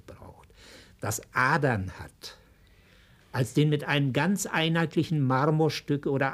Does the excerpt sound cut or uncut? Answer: uncut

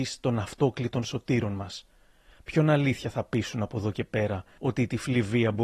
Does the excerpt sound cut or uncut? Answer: uncut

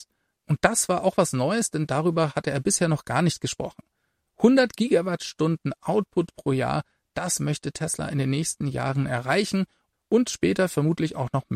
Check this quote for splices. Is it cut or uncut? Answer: uncut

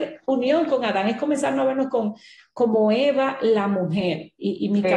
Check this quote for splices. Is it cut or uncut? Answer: uncut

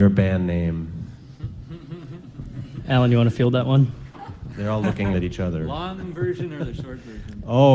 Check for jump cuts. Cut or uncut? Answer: cut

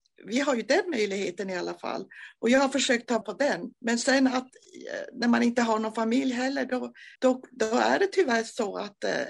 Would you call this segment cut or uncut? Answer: cut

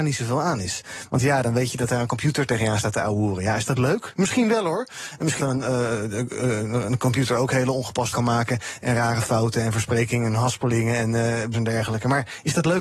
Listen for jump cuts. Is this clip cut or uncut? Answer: cut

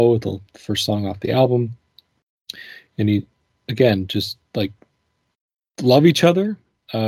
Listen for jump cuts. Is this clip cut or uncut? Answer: uncut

